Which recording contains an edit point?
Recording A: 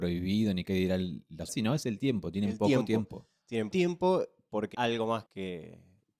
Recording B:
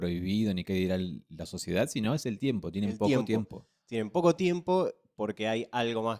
A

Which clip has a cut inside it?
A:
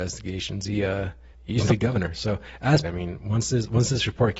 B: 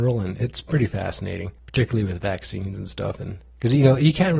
A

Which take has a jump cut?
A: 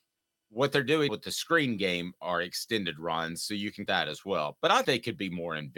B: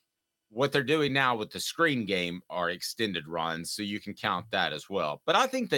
A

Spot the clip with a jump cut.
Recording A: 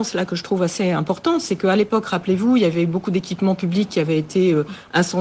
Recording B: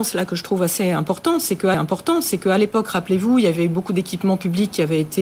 B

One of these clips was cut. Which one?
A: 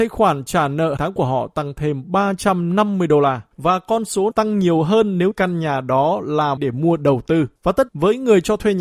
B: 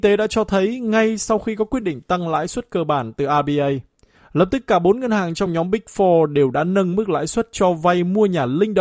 A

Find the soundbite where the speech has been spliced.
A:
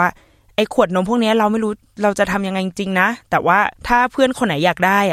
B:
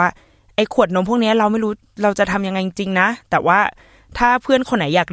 A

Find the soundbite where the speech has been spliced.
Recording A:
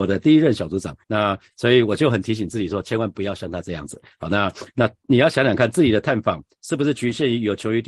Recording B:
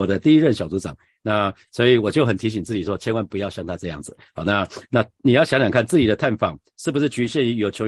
A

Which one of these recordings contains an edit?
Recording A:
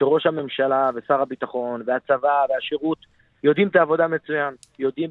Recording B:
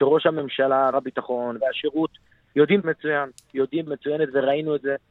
B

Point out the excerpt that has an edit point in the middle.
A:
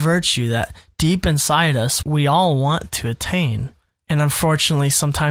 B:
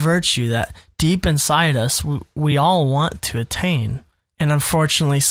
A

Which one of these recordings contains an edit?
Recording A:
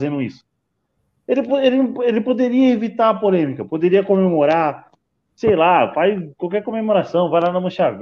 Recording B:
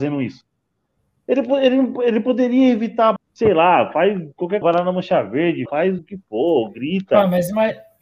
B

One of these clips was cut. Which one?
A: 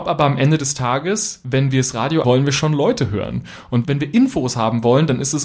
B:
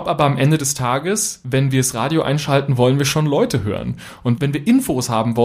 A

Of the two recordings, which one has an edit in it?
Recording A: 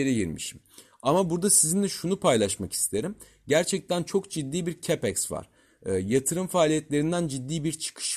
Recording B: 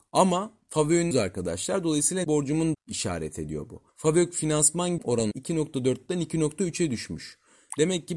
B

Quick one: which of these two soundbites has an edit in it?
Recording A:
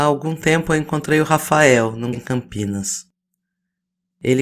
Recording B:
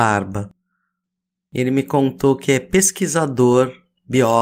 A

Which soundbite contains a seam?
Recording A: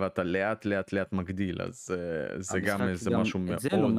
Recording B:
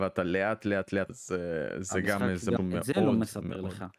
B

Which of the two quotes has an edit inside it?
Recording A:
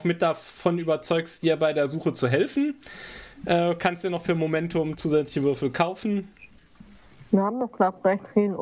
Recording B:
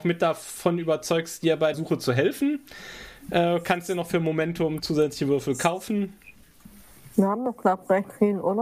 B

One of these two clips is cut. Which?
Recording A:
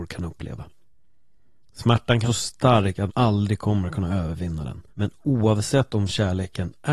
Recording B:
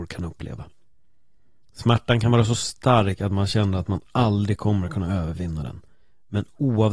A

